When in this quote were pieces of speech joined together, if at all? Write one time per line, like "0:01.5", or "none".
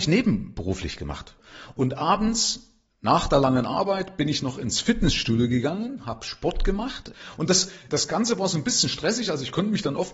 0:07.9